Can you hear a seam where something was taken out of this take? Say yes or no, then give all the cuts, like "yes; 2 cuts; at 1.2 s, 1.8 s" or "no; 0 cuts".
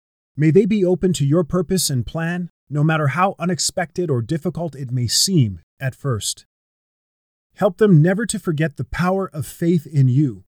yes; 2 cuts; at 2.6 s, 5.7 s